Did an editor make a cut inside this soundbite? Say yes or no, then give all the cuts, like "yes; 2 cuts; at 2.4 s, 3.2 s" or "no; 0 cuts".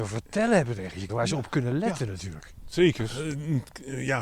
yes; 1 cut; at 1.1 s